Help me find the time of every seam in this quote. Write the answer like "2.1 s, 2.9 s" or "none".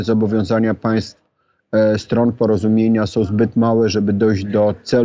none